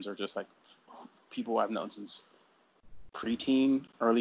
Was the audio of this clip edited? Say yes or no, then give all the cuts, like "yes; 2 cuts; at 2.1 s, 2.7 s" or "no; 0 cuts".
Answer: yes; 1 cut; at 3.1 s